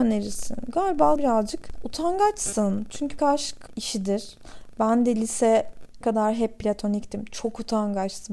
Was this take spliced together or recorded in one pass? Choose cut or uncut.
cut